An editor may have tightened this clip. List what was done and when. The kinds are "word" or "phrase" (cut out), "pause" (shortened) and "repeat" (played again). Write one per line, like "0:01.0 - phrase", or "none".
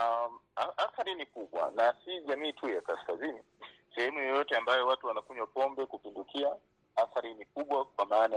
none